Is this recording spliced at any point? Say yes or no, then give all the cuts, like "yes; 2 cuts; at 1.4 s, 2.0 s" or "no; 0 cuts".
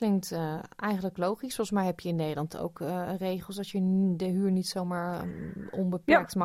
no; 0 cuts